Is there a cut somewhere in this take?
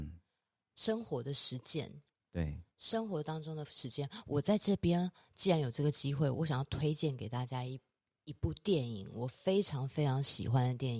no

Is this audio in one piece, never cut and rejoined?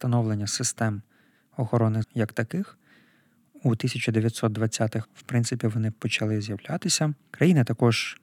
no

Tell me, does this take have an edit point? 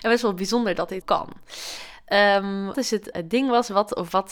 yes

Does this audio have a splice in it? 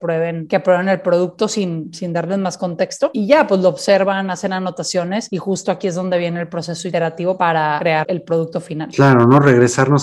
yes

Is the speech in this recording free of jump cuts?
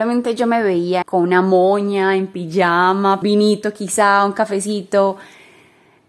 no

